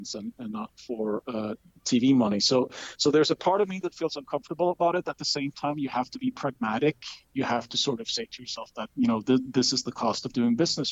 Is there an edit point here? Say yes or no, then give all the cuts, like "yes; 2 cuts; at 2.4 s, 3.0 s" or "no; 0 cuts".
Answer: no; 0 cuts